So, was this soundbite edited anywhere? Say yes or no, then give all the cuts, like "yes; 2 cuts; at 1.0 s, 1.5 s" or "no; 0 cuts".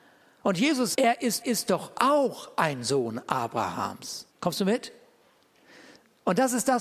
yes; 3 cuts; at 0.9 s, 1.4 s, 4.3 s